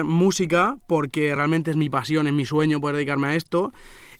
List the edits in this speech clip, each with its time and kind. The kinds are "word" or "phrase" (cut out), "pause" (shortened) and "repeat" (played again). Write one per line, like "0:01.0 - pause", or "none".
none